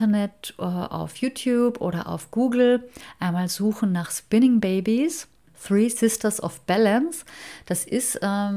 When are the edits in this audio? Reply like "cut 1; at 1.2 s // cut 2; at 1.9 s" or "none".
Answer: none